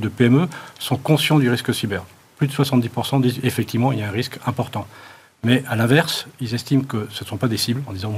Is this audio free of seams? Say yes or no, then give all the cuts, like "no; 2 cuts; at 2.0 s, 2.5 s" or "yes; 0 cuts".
yes; 0 cuts